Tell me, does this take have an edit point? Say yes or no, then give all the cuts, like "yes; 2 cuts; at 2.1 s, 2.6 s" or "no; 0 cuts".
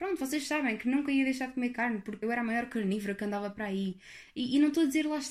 yes; 1 cut; at 2.2 s